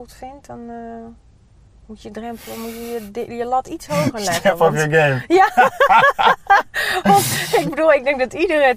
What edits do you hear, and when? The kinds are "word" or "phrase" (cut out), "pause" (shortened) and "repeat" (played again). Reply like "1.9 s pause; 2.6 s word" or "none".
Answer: none